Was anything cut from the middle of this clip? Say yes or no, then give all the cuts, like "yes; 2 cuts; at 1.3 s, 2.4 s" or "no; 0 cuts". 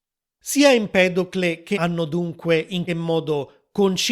yes; 2 cuts; at 1.7 s, 2.9 s